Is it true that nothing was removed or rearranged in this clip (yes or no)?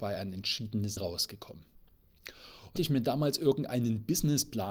no